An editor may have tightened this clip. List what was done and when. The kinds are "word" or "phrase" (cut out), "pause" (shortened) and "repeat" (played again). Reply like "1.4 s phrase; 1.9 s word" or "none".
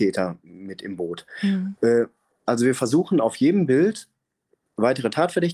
none